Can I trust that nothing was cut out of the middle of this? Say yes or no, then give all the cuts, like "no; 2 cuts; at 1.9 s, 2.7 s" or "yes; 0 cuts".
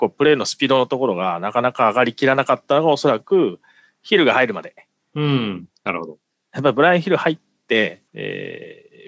no; 1 cut; at 8.1 s